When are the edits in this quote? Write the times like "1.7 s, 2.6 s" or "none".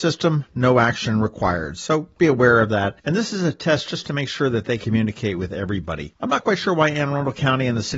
2.2 s, 4.8 s